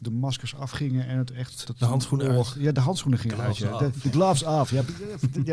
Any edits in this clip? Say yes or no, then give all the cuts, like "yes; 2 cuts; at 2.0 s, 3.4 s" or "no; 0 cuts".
yes; 1 cut; at 1.6 s